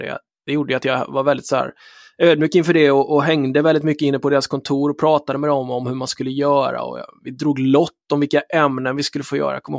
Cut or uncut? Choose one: uncut